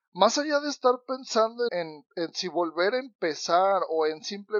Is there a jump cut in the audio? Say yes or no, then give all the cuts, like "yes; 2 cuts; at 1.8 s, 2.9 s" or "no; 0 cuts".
yes; 1 cut; at 1.7 s